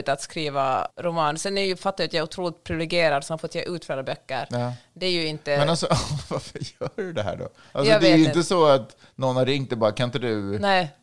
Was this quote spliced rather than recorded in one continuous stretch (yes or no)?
yes